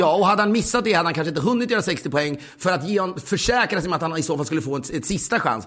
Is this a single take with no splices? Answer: yes; 0 cuts

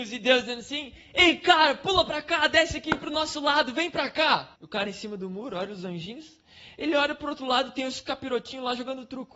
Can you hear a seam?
yes; 1 cut; at 4.5 s

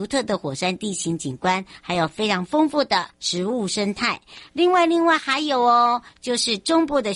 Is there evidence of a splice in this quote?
yes; 1 cut; at 3.1 s

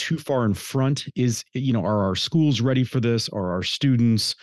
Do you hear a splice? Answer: no; 0 cuts

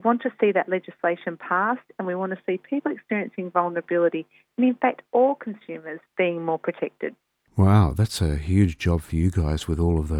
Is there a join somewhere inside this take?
no; 0 cuts

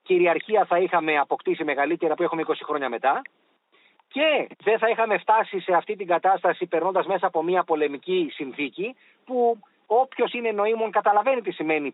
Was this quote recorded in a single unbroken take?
no; 1 cut; at 2.2 s

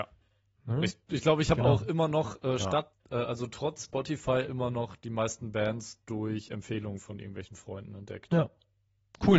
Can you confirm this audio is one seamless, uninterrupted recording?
yes; 0 cuts

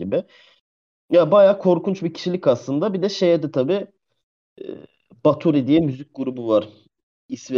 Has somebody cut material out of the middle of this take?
no; 0 cuts

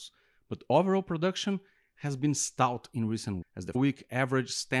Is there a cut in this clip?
yes; 2 cuts; at 3.4 s, 3.7 s

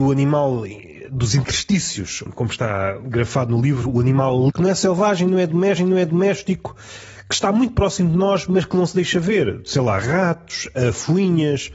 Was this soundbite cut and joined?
yes; 2 cuts; at 4.5 s, 5.8 s

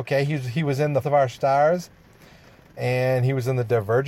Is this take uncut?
no; 1 cut; at 1.0 s

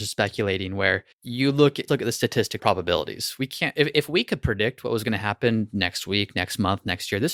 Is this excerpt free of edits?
no; 3 cuts; at 1.1 s, 1.9 s, 2.6 s

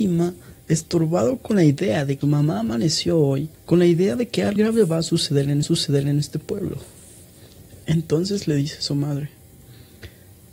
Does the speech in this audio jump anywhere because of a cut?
yes; 4 cuts; at 2.2 s, 3.5 s, 4.6 s, 5.6 s

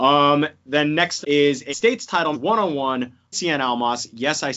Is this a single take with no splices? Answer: no; 4 cuts; at 1.2 s, 1.7 s, 2.3 s, 3.3 s

